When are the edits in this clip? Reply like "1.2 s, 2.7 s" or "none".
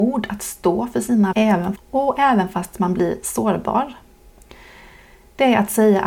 1.3 s, 1.8 s